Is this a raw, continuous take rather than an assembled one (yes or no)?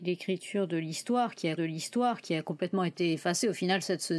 no